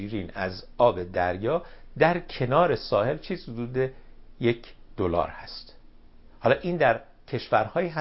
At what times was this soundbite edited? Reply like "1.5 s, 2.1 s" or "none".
none